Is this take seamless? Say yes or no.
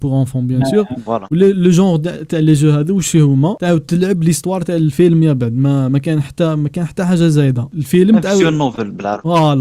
yes